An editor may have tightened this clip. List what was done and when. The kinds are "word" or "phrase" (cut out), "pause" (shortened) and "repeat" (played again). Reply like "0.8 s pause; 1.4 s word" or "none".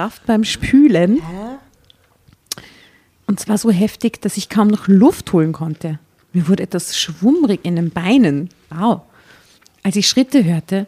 none